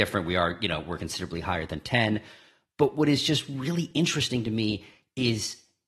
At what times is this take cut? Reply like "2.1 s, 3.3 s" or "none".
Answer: none

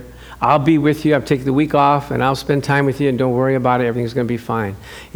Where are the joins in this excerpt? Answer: none

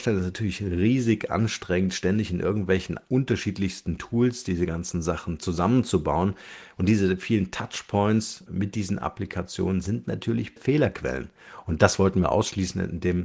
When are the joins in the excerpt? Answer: 8.5 s, 10.6 s

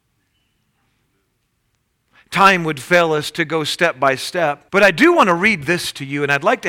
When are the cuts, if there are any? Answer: 4.7 s

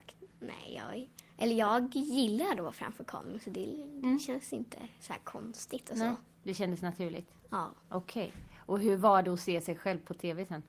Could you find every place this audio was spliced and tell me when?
1.3 s

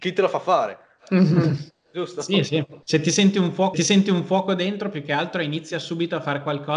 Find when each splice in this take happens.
2.8 s, 3.7 s

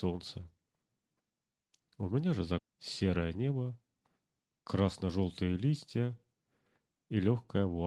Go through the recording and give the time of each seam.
2.6 s

